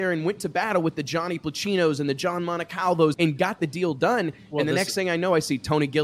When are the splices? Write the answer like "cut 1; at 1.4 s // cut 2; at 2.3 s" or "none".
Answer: cut 1; at 3.1 s